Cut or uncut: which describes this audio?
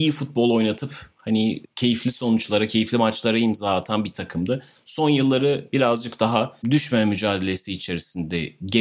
cut